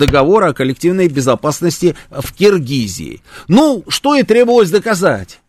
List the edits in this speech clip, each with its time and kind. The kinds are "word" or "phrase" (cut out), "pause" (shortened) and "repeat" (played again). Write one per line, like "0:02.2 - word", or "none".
0:03.9 - word